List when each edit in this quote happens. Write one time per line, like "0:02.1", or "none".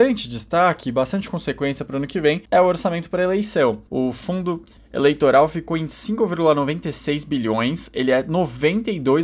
0:02.5
0:03.9
0:04.8